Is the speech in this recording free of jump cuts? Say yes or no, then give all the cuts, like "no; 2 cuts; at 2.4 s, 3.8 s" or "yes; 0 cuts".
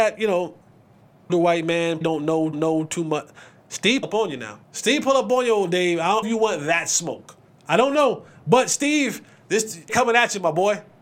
no; 8 cuts; at 1.3 s, 2.0 s, 2.5 s, 4.0 s, 4.6 s, 6.2 s, 7.5 s, 9.9 s